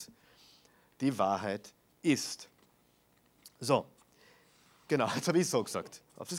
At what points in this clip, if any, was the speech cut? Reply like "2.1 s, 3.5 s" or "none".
none

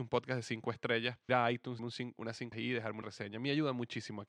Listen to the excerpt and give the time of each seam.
1.3 s, 1.8 s, 2.5 s, 3.0 s

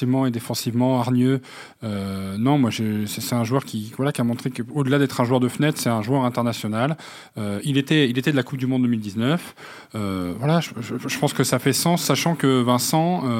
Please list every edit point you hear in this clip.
3.6 s

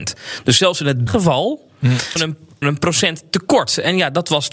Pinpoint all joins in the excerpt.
1.1 s, 2.2 s, 2.6 s

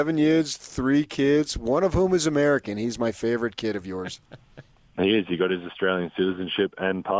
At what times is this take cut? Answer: none

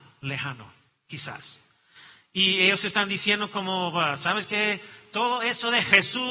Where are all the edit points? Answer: none

